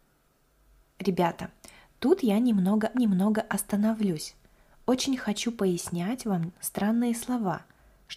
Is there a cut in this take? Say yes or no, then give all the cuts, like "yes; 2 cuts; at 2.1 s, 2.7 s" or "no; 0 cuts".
yes; 1 cut; at 2.9 s